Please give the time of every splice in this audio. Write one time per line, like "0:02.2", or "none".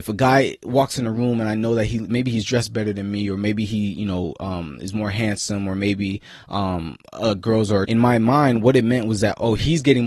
0:07.8